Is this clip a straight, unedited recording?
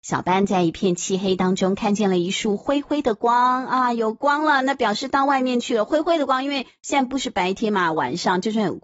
yes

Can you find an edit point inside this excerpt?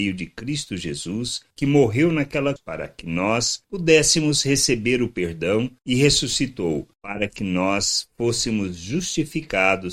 yes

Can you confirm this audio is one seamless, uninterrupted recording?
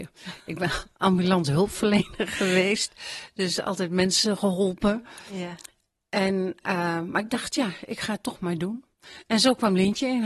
yes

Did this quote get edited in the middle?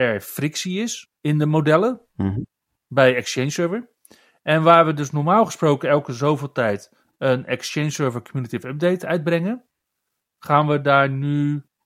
no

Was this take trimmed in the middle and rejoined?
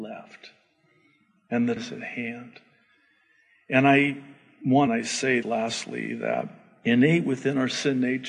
yes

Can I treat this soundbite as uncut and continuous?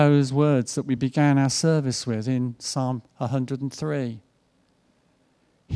yes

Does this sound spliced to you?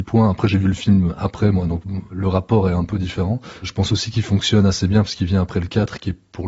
yes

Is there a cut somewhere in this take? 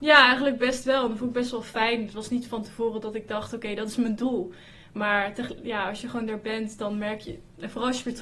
no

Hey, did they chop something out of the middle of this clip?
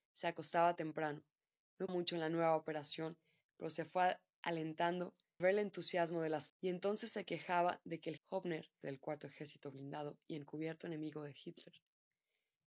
yes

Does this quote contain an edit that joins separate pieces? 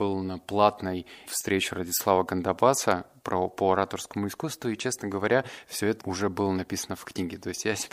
yes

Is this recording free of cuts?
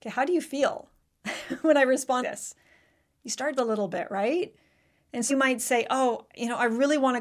no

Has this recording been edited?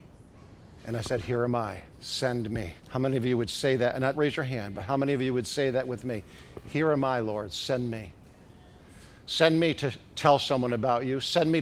yes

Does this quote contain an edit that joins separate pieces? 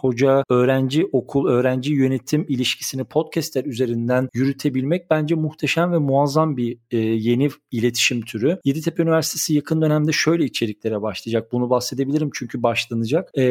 no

